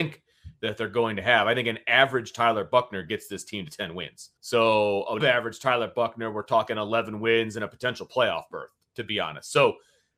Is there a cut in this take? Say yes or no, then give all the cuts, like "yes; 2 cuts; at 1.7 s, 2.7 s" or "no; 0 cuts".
yes; 2 cuts; at 4.4 s, 5.2 s